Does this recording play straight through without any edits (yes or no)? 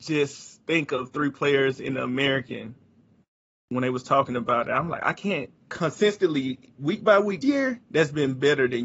no